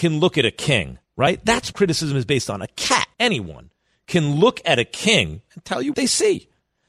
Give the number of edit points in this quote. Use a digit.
4